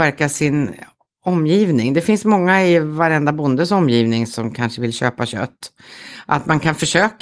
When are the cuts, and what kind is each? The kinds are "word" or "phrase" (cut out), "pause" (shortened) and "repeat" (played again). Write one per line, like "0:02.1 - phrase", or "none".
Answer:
none